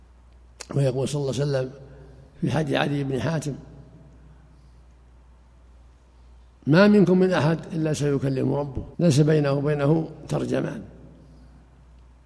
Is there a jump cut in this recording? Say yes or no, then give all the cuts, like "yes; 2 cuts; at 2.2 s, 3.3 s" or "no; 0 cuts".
yes; 1 cut; at 8.9 s